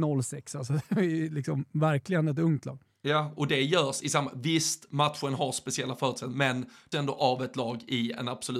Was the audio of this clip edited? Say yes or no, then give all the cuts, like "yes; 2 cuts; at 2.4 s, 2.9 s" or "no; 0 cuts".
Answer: yes; 1 cut; at 6.9 s